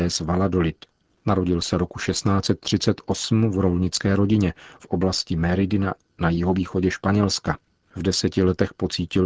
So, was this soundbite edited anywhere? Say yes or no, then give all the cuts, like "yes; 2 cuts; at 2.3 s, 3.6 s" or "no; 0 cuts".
yes; 1 cut; at 4.8 s